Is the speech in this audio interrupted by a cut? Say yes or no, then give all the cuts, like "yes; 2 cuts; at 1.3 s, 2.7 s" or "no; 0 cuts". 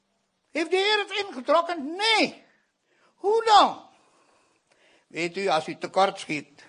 no; 0 cuts